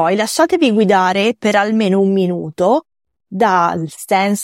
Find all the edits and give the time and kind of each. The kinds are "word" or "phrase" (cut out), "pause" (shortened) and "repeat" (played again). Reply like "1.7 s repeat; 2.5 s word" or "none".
none